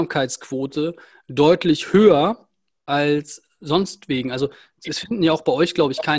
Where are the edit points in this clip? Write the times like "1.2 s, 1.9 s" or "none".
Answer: none